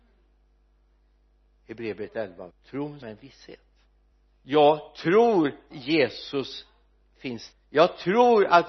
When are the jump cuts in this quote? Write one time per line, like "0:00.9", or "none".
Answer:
0:02.5
0:03.0
0:04.1
0:05.7
0:07.5